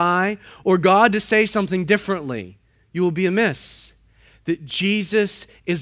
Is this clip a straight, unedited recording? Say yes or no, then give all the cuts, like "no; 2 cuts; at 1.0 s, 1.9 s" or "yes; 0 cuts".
yes; 0 cuts